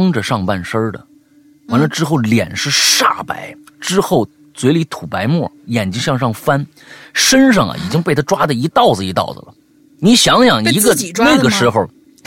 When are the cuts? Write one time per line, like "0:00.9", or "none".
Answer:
0:05.6